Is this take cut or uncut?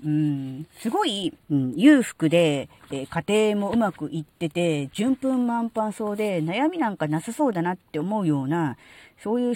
cut